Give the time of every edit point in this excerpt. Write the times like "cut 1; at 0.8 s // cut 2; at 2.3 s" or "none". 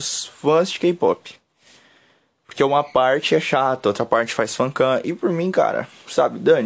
none

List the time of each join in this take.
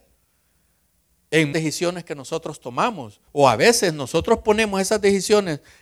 cut 1; at 1.5 s // cut 2; at 3.3 s

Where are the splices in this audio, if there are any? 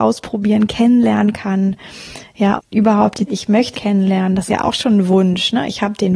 cut 1; at 2.6 s // cut 2; at 3.3 s // cut 3; at 3.7 s // cut 4; at 4.5 s

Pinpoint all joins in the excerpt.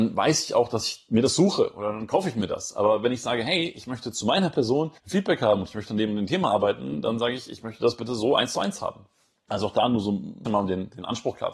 cut 1; at 5.0 s // cut 2; at 10.4 s

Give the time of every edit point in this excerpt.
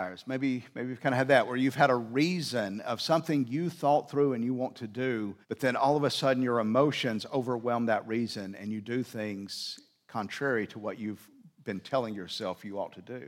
cut 1; at 5.4 s

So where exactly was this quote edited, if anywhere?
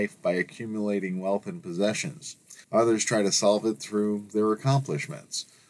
cut 1; at 2.6 s

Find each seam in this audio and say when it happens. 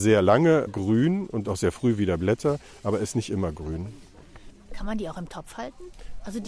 cut 1; at 1.4 s

